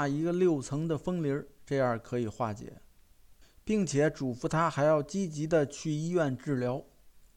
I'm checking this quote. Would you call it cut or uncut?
cut